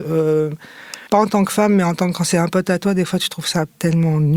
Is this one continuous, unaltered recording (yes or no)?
no